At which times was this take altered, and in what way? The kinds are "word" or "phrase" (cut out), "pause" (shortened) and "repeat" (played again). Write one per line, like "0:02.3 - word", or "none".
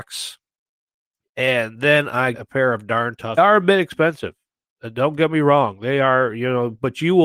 0:02.3 - word
0:03.4 - phrase